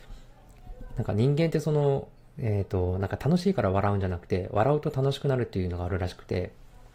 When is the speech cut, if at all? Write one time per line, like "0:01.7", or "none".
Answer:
0:02.2